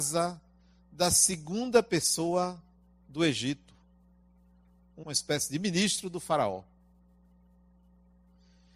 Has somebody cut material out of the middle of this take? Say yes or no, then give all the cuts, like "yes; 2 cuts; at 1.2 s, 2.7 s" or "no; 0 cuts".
yes; 1 cut; at 5.0 s